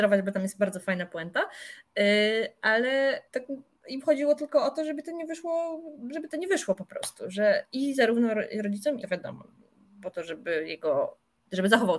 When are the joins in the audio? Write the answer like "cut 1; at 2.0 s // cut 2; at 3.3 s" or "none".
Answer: cut 1; at 3.3 s // cut 2; at 6.3 s // cut 3; at 9.0 s